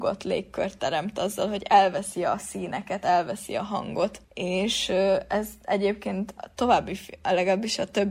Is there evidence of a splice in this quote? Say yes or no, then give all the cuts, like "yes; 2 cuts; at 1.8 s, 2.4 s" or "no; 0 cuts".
no; 0 cuts